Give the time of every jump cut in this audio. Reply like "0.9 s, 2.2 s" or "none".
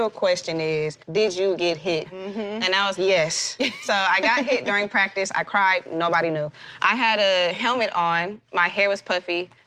1.0 s, 2.9 s